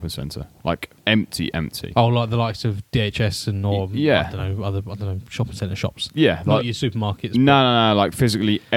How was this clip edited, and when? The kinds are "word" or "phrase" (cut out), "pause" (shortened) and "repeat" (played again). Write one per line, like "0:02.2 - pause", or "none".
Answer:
0:01.0 - pause